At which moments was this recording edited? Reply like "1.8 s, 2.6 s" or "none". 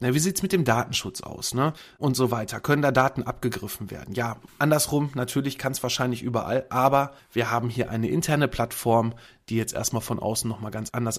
none